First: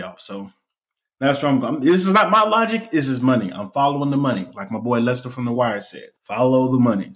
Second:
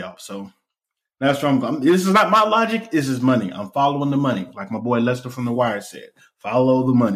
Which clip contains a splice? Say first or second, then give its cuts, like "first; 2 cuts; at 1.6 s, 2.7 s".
first; 1 cut; at 6.2 s